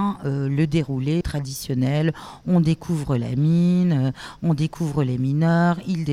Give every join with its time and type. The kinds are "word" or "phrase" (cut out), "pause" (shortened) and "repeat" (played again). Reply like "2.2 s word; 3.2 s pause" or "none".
1.2 s word